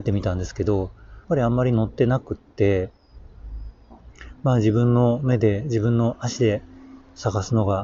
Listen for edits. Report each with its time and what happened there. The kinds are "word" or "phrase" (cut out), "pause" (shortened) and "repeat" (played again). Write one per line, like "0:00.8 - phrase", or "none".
0:01.2 - pause